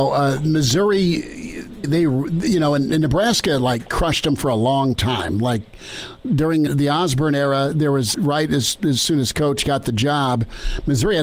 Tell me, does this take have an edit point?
yes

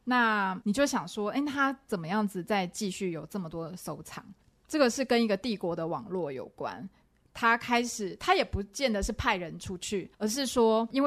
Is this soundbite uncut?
no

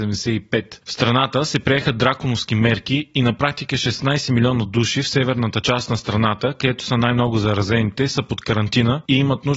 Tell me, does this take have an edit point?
no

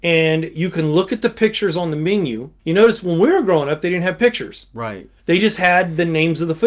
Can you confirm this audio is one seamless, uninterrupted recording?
no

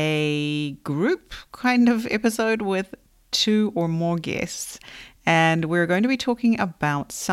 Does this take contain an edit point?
yes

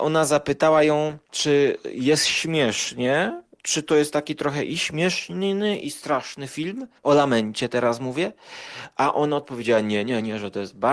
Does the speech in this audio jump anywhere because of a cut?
yes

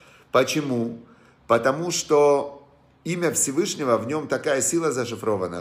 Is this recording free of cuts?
yes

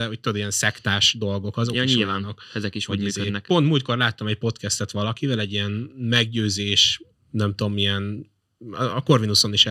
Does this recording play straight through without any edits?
yes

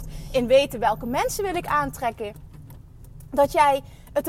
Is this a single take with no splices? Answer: yes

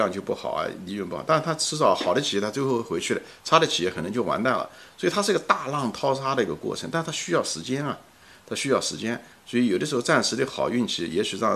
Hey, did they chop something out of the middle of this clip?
no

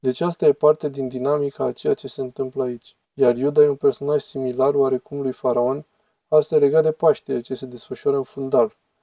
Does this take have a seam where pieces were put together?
yes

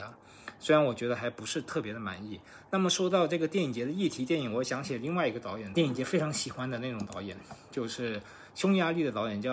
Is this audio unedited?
no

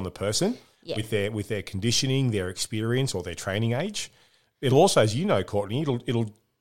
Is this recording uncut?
yes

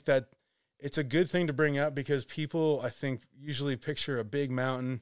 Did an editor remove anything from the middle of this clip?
no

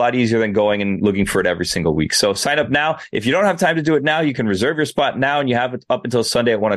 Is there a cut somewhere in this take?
no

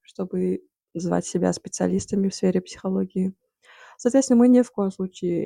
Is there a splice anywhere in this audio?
no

